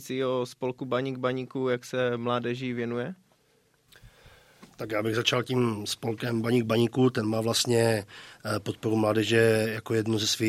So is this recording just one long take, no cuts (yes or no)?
yes